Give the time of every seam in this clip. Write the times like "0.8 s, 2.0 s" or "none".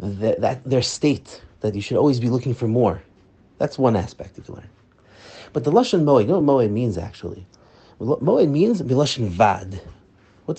none